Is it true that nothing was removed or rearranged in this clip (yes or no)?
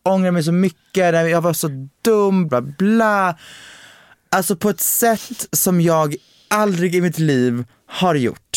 no